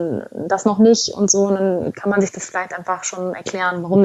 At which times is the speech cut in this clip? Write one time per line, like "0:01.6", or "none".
none